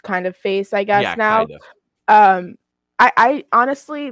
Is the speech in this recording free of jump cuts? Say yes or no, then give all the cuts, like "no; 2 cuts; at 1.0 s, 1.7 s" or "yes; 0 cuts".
yes; 0 cuts